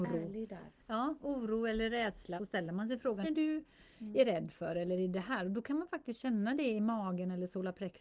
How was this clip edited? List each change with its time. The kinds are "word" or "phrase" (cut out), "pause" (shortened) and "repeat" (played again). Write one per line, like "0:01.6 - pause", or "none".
0:02.4 - word
0:03.2 - phrase